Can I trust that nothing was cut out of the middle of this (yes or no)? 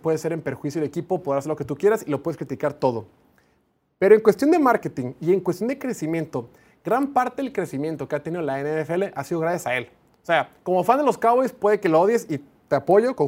yes